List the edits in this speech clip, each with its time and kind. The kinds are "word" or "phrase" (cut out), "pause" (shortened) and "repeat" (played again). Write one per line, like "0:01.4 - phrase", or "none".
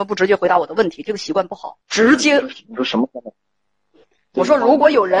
0:01.8 - pause